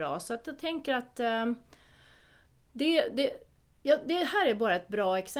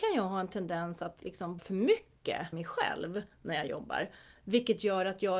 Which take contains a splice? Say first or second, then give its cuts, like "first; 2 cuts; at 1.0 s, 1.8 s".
second; 2 cuts; at 1.6 s, 2.5 s